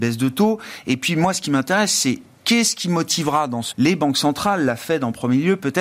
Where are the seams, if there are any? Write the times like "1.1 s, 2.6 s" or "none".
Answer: 3.7 s